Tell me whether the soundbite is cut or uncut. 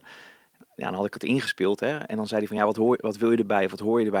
uncut